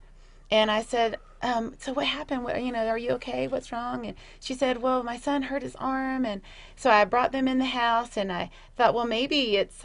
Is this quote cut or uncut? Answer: uncut